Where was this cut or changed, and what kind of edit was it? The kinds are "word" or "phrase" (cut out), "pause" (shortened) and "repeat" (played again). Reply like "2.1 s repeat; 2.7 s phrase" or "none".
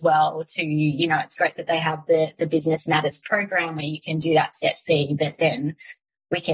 none